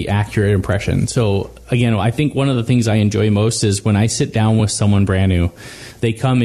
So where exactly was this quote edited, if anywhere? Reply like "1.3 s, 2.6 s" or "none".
none